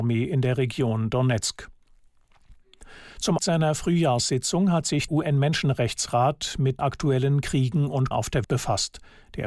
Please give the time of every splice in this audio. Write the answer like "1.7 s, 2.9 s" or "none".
3.4 s, 5.1 s, 6.8 s, 8.1 s, 8.4 s